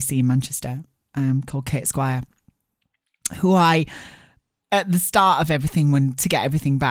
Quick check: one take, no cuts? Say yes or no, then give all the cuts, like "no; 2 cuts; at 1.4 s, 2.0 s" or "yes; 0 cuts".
yes; 0 cuts